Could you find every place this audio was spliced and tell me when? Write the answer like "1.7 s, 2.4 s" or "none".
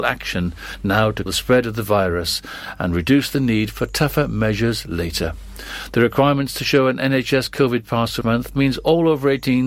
1.3 s, 8.2 s